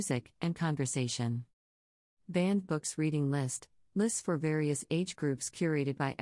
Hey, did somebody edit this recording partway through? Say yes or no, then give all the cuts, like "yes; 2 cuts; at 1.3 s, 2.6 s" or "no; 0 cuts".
no; 0 cuts